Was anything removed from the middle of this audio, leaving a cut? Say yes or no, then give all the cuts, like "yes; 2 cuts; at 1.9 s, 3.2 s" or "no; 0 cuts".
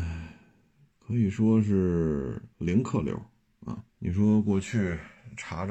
yes; 2 cuts; at 2.5 s, 3.9 s